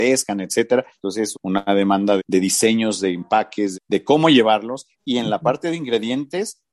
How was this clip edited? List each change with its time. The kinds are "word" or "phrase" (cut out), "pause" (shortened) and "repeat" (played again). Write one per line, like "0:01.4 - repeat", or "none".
0:00.9 - pause
0:01.3 - phrase
0:02.2 - word
0:03.7 - word
0:04.9 - pause